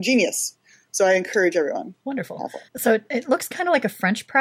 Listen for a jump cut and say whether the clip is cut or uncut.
cut